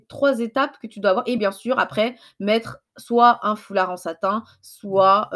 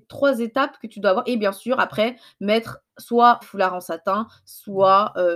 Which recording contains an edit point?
second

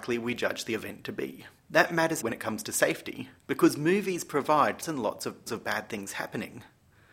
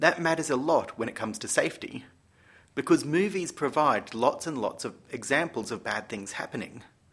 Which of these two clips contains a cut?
first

